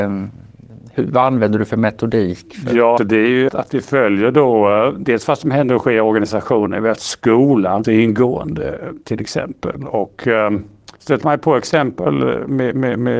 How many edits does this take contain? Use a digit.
5